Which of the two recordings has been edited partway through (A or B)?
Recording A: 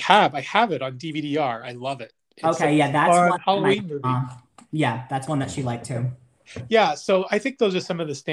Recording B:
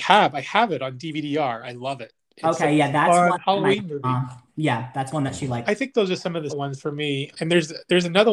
B